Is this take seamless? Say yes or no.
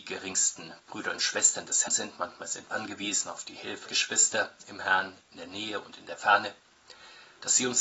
no